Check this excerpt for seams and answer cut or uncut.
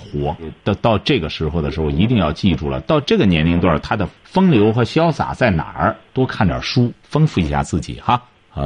cut